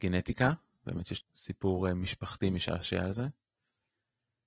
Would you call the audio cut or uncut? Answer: cut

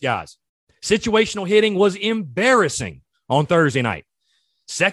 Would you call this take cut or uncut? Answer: uncut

